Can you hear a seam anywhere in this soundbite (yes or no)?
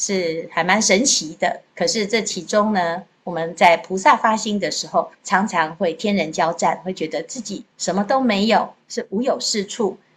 yes